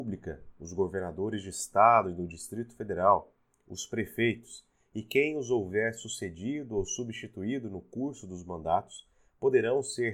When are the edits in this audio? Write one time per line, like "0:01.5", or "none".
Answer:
none